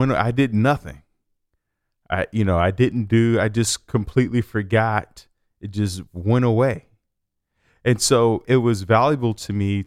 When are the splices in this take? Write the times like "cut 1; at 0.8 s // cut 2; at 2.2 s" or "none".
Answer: cut 1; at 8.4 s